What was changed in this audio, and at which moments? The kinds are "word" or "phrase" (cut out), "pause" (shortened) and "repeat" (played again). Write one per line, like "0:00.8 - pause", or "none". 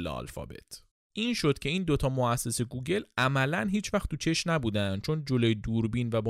0:00.9 - pause